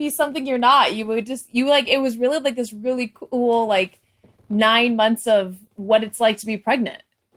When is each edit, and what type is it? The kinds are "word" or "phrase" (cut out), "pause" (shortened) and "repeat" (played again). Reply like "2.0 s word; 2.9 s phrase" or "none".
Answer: none